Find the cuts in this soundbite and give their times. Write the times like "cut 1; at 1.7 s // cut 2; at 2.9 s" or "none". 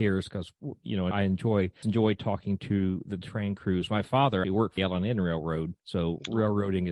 cut 1; at 1.1 s // cut 2; at 1.8 s // cut 3; at 4.4 s // cut 4; at 4.8 s // cut 5; at 5.8 s